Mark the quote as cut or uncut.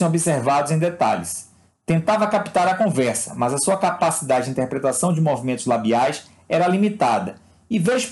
uncut